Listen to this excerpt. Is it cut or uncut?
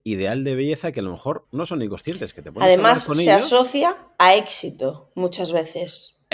uncut